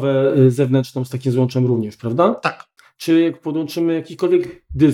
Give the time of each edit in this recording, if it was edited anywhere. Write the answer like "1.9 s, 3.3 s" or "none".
2.8 s

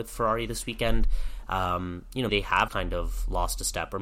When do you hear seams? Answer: 2.3 s, 2.7 s

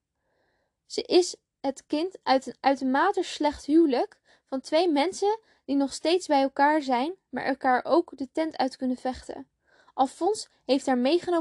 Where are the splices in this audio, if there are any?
none

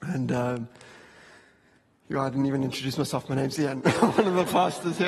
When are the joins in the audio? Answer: none

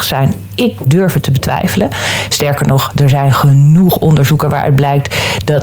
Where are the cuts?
none

